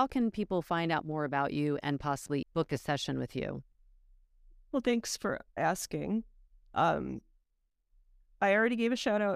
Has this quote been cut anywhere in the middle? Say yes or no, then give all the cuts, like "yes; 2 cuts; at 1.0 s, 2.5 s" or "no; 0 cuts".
yes; 2 cuts; at 2.4 s, 5.6 s